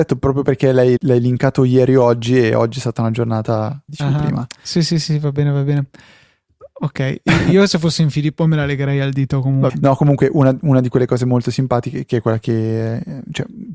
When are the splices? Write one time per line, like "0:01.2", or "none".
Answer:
0:01.0
0:03.9
0:09.7